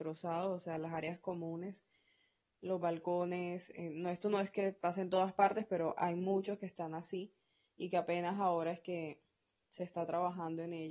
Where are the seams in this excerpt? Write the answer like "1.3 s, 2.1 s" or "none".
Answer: none